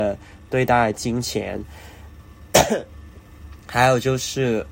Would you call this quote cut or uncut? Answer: uncut